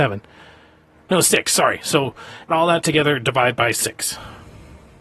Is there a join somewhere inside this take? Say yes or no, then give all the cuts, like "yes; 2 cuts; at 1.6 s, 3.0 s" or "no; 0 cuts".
yes; 1 cut; at 2.5 s